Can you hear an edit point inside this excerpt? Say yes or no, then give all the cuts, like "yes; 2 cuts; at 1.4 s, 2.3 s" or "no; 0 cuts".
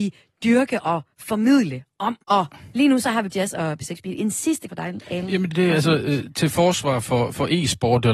yes; 4 cuts; at 2.2 s, 3.3 s, 4.7 s, 5.5 s